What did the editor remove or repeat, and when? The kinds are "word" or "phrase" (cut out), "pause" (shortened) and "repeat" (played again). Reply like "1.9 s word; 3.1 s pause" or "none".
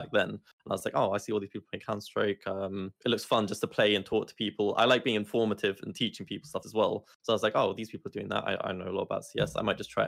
3.0 s pause; 6.6 s phrase